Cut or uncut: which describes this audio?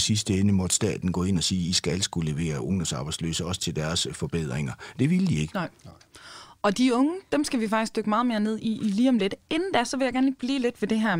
uncut